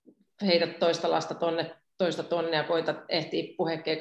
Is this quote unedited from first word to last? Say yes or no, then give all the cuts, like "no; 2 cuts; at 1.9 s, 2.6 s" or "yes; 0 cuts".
yes; 0 cuts